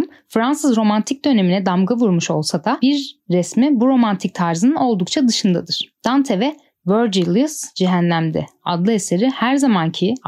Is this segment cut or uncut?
uncut